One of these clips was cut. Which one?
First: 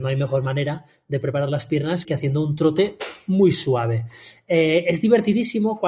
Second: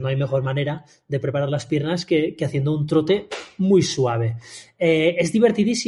first; 1 cut; at 2.0 s

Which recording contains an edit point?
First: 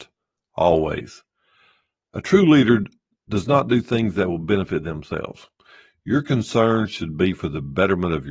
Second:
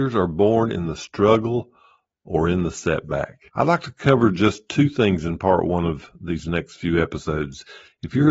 second; 1 cut; at 3.5 s

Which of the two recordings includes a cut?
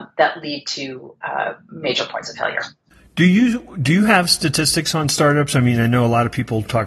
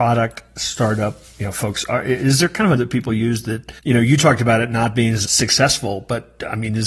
second; 3 cuts; at 2.8 s, 3.8 s, 5.2 s

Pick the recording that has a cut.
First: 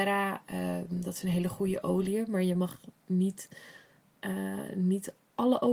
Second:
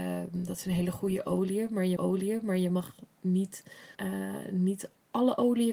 second; 2 cuts; at 2.0 s, 3.9 s

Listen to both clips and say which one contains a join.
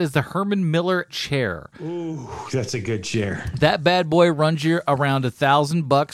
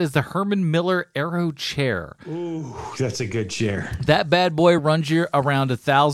first; 1 cut; at 1.1 s

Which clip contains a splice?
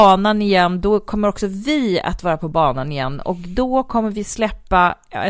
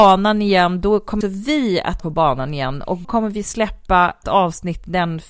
second; 4 cuts; at 1.2 s, 2.0 s, 3.0 s, 4.2 s

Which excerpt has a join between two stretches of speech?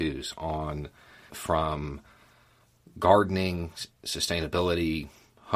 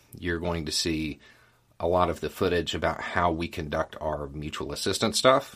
first; 1 cut; at 1.3 s

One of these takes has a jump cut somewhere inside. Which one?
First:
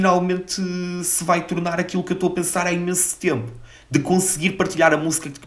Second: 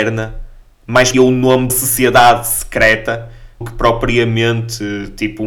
second; 3 cuts; at 1.1 s, 1.7 s, 3.6 s

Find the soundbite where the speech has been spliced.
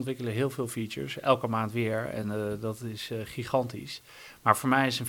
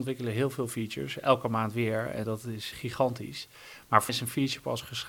second; 3 cuts; at 2.2 s, 2.7 s, 4.1 s

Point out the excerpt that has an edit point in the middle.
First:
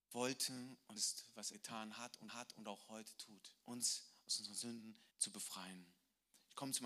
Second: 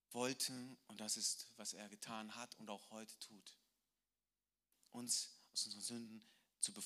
first; 5 cuts; at 1.0 s, 1.5 s, 2.3 s, 3.6 s, 5.1 s

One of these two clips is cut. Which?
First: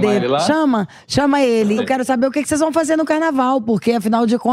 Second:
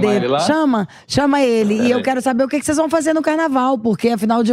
first; 1 cut; at 1.8 s

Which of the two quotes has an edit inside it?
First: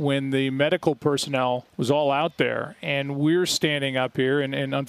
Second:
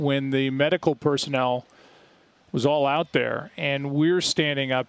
first; 1 cut; at 1.7 s

